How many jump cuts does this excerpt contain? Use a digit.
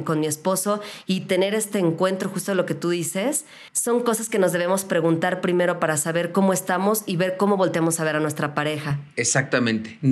1